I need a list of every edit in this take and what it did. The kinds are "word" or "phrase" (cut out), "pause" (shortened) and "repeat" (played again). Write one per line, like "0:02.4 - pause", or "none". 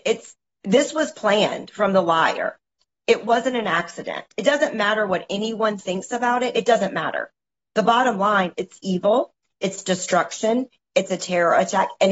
none